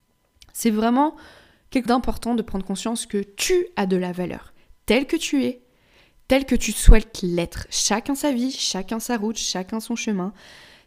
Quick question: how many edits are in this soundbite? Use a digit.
1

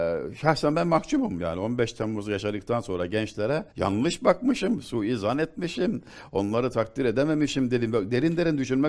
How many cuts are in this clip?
1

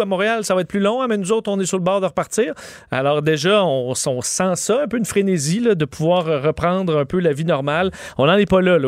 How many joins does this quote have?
0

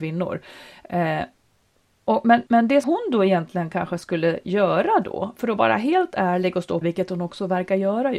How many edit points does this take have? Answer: 3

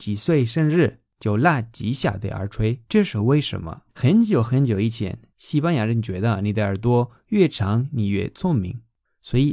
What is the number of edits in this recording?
2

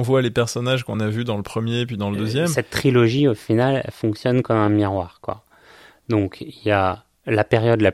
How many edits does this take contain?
0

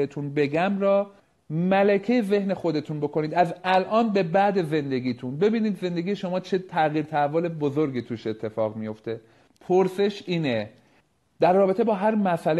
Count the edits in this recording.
1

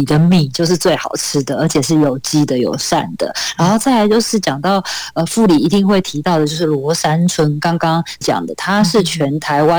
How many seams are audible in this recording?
1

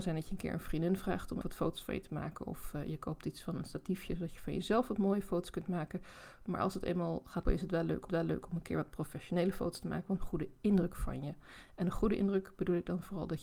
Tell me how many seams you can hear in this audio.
4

